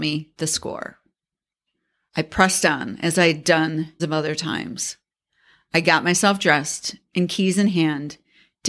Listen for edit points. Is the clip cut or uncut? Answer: cut